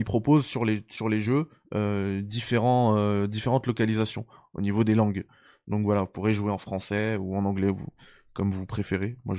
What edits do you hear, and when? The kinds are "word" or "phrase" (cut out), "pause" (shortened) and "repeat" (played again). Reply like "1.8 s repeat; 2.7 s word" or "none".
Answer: none